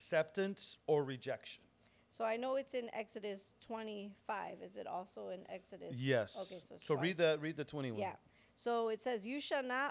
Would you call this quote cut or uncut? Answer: uncut